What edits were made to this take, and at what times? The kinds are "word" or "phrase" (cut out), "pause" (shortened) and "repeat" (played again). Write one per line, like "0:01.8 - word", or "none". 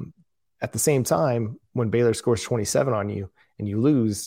none